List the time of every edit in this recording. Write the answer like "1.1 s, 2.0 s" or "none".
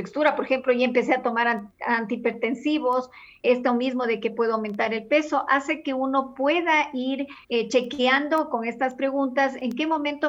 3.4 s, 7.4 s